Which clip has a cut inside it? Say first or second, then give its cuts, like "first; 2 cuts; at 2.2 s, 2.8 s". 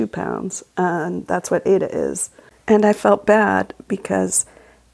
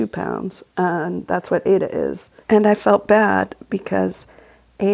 second; 1 cut; at 2.4 s